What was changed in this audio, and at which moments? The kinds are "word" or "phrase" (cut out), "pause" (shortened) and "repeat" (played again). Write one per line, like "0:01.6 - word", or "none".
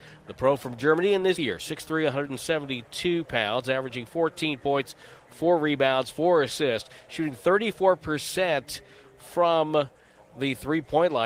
0:01.3 - word